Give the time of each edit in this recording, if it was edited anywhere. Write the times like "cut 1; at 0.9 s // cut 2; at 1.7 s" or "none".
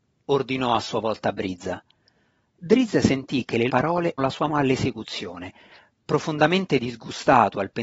cut 1; at 3.7 s // cut 2; at 4.2 s // cut 3; at 4.5 s